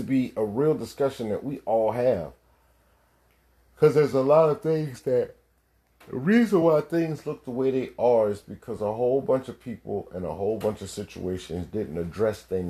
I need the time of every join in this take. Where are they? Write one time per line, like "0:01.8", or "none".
none